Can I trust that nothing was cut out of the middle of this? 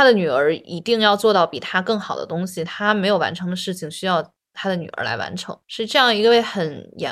no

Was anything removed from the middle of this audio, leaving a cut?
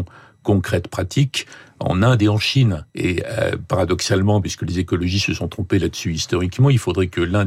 yes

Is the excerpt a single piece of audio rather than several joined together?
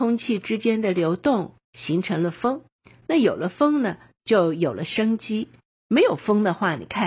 yes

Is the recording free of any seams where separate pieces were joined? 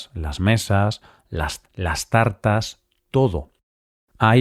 no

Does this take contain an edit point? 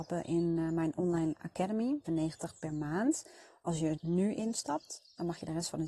yes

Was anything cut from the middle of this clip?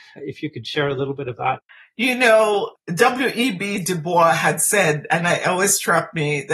yes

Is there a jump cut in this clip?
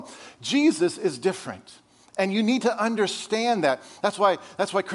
no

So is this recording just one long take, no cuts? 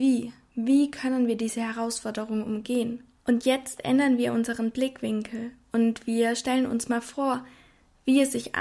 yes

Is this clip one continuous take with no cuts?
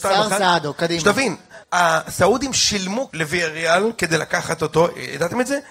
no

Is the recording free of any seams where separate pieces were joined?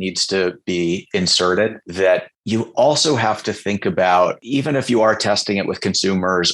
yes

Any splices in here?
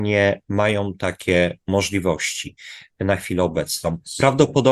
no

